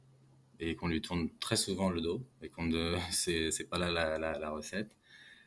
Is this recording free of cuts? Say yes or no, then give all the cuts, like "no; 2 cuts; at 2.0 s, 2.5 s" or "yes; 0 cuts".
no; 1 cut; at 2.3 s